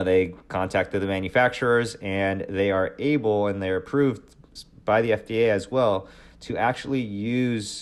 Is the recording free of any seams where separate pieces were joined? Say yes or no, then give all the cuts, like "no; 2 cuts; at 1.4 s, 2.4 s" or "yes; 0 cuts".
yes; 0 cuts